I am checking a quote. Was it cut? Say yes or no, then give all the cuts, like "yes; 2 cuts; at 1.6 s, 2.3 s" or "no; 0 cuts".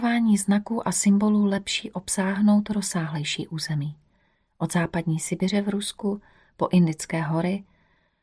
no; 0 cuts